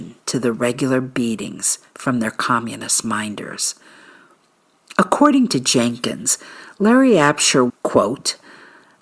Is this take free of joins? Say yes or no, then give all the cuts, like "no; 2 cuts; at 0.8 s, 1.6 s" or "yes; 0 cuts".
no; 1 cut; at 7.7 s